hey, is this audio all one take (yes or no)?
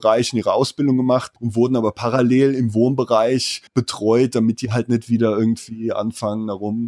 no